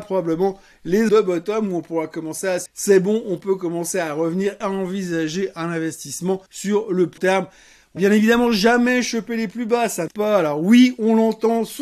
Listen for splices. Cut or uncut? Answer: cut